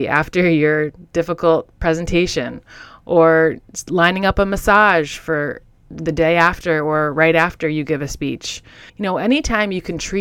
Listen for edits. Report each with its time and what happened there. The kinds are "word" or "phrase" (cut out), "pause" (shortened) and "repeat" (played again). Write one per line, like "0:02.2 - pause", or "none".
0:06.0 - phrase
0:08.9 - pause

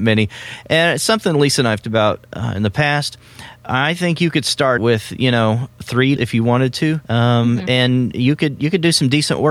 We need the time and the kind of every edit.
0:01.8 - word
0:04.8 - word
0:06.2 - word
0:07.0 - pause

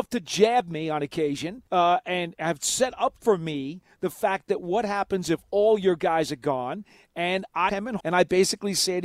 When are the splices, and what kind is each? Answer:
0:01.7 - pause
0:07.7 - word
0:08.0 - word

